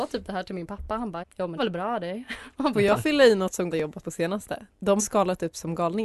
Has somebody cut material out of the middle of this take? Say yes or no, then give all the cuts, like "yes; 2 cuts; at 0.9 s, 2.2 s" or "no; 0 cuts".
yes; 6 cuts; at 1.2 s, 1.6 s, 2.7 s, 3.7 s, 4.0 s, 5.0 s